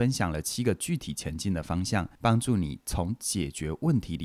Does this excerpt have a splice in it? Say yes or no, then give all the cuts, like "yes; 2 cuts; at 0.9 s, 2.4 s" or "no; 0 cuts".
yes; 1 cut; at 2.1 s